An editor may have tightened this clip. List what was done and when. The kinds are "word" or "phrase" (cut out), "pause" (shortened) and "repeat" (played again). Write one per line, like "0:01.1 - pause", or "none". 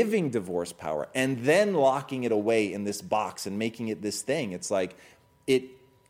none